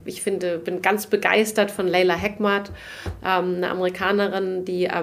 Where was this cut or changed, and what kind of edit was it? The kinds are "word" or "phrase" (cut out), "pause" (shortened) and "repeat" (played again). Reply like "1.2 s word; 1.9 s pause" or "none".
none